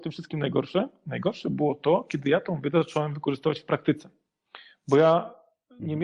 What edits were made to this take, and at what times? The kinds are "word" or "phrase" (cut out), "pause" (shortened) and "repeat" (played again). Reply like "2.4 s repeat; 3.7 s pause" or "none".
none